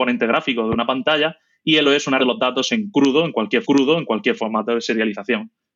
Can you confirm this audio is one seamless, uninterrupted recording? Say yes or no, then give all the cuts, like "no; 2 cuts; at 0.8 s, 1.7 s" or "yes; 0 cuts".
no; 3 cuts; at 1.8 s, 2.2 s, 3.6 s